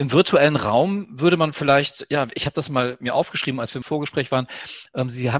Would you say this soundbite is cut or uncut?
cut